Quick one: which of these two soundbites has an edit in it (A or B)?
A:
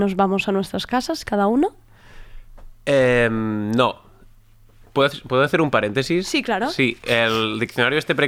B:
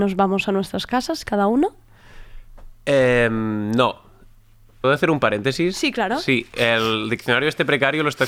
B